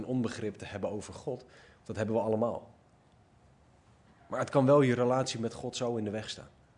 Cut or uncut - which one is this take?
uncut